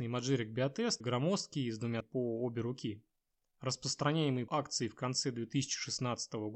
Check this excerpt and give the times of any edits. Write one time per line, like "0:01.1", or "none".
0:01.0
0:02.0
0:04.5